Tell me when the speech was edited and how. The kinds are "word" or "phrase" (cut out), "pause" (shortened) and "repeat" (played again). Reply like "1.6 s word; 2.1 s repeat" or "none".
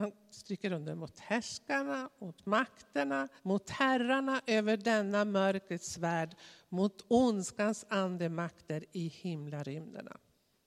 3.4 s pause